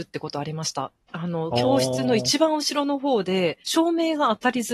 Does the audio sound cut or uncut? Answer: cut